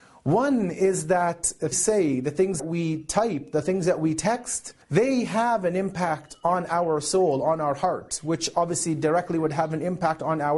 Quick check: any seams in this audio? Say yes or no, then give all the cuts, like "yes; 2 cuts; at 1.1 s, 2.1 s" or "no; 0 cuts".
yes; 3 cuts; at 1.7 s, 2.6 s, 4.8 s